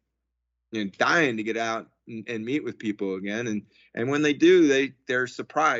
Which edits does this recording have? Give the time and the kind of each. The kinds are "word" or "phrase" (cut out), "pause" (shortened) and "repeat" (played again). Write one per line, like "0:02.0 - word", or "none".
none